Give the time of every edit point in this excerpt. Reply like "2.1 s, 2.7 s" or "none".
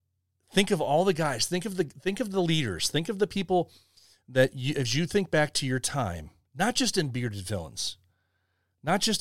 none